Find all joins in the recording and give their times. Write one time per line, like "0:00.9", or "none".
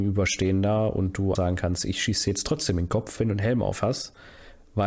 0:01.4
0:03.2